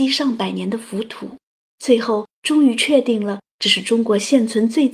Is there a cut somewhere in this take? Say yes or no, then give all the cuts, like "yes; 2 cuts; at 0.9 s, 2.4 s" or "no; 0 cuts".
yes; 1 cut; at 1.6 s